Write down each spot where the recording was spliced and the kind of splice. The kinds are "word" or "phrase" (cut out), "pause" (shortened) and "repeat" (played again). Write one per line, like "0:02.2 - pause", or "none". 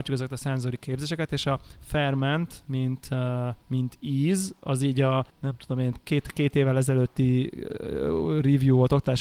0:03.6 - pause
0:05.3 - pause